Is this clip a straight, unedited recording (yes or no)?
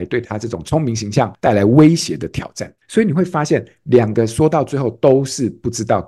no